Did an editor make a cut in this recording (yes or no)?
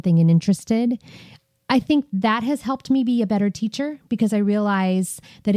no